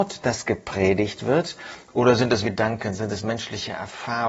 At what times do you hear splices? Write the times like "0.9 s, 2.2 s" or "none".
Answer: 2.4 s